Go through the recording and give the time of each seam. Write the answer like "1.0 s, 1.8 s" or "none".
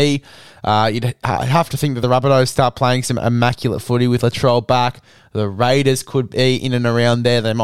none